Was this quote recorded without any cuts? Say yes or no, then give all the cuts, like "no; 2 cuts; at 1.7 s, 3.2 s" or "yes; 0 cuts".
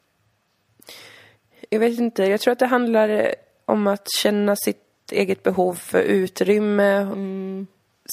yes; 0 cuts